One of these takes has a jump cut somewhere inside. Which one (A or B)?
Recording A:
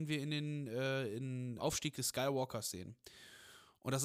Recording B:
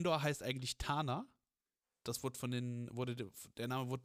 A